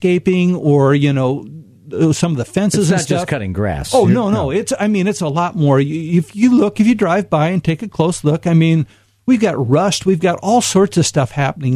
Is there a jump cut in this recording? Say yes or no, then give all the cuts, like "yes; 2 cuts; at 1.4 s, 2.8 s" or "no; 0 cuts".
no; 0 cuts